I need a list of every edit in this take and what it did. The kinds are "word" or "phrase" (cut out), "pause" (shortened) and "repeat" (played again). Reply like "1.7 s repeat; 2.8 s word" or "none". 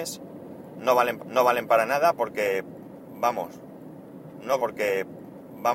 1.2 s repeat; 4.6 s repeat